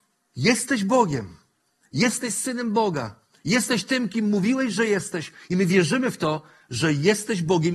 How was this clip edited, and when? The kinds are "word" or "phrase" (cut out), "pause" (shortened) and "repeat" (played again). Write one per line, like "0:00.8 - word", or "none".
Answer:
none